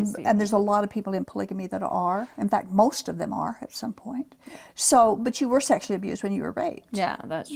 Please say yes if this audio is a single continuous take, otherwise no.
yes